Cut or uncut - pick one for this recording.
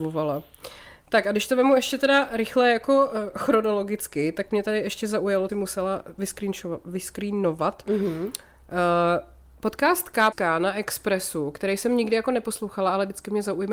cut